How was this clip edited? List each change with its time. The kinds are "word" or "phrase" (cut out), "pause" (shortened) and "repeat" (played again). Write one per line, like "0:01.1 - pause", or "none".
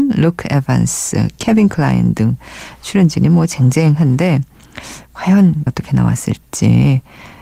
0:05.7 - word